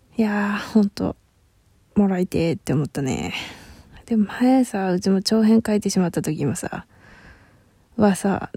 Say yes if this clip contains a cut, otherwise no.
no